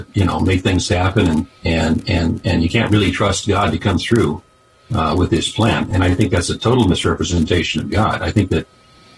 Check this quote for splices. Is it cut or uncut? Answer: cut